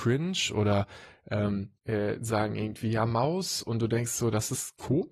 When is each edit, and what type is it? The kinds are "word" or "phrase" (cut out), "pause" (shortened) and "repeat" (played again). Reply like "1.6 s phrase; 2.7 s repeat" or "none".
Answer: 1.8 s pause